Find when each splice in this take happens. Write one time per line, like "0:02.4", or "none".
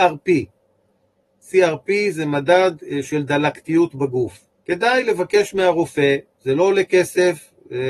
0:04.5